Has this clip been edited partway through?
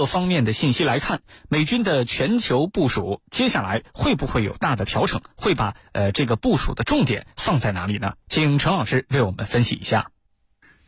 yes; 1 cut; at 8.2 s

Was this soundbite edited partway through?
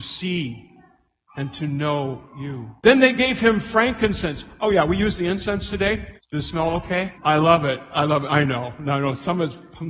yes; 3 cuts; at 2.8 s, 6.2 s, 7.1 s

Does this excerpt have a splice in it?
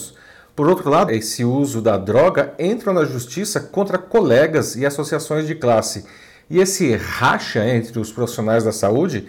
yes; 1 cut; at 1.1 s

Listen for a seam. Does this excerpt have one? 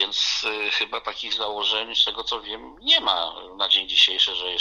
no; 0 cuts

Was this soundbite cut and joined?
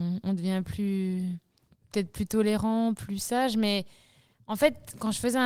no; 0 cuts

